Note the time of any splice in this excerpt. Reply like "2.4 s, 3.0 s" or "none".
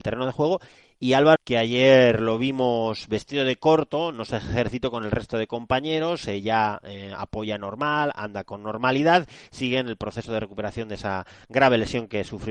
1.4 s